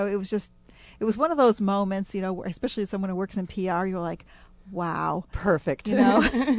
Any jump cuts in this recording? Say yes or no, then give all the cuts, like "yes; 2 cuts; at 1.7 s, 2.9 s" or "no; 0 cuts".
no; 0 cuts